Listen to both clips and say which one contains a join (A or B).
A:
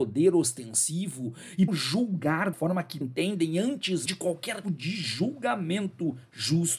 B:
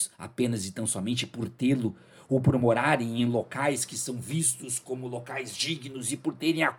A